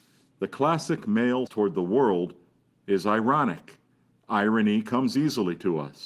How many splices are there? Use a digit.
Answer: 1